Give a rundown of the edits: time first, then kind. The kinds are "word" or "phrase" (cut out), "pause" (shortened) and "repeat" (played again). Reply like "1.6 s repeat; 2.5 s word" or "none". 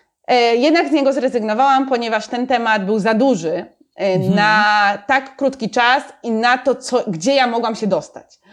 none